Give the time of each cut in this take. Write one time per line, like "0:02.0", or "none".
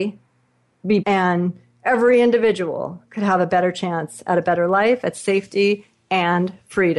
0:01.0